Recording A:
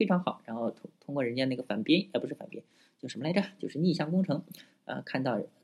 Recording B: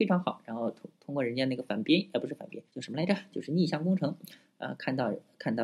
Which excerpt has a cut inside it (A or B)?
B